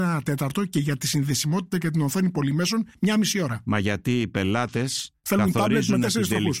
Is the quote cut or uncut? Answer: uncut